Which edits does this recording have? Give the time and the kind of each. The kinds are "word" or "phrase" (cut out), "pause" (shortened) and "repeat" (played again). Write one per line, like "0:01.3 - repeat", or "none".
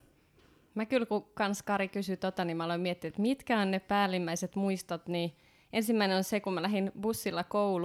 none